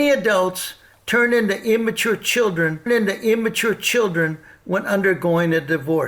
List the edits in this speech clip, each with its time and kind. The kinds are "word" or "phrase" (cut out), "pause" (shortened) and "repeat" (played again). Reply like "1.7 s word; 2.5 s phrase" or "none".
2.9 s repeat

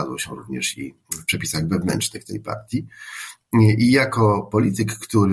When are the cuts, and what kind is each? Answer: 1.0 s pause

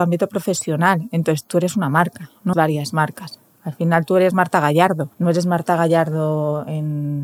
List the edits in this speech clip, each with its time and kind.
2.5 s word; 5.1 s pause

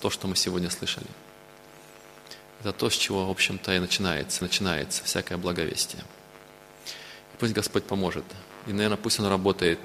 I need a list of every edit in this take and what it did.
4.4 s repeat

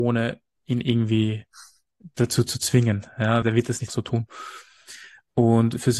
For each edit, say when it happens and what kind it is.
3.4 s word; 3.9 s word

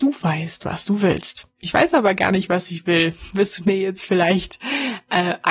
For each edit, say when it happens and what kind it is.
1.5 s pause

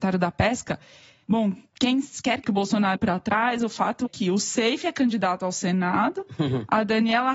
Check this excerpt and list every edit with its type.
2.4 s word; 3.0 s word; 4.1 s word

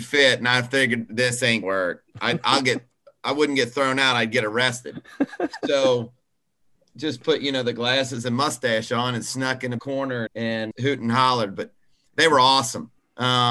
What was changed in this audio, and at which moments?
1.6 s word; 9.8 s word; 10.3 s word; 10.7 s word

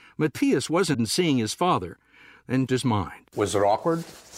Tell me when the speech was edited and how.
0.9 s word; 2.7 s word; 3.3 s pause

